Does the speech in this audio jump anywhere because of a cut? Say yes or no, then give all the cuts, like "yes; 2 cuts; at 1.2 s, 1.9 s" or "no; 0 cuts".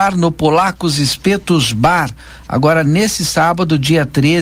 no; 0 cuts